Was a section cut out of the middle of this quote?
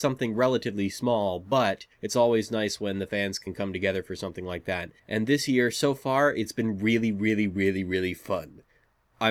yes; 2 cuts; at 1.9 s, 5.0 s

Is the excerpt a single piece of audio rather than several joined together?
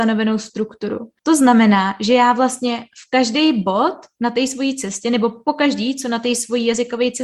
no; 1 cut; at 1.2 s

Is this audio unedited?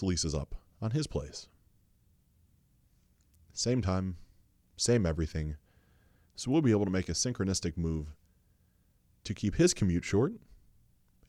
yes; 0 cuts

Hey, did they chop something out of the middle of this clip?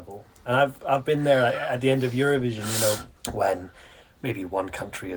yes; 1 cut; at 3.2 s

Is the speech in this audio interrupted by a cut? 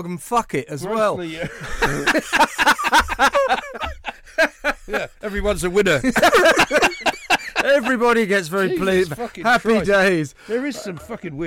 no; 0 cuts

